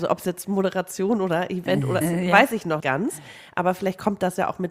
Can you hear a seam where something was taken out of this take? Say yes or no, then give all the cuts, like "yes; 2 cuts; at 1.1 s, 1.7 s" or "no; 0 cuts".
yes; 2 cuts; at 2.0 s, 2.8 s